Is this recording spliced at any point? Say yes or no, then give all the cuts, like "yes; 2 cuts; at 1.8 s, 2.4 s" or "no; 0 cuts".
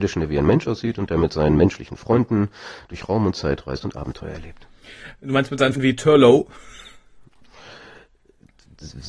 yes; 1 cut; at 5.8 s